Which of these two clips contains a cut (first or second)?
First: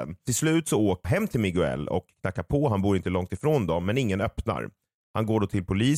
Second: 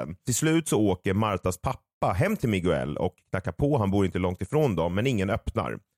first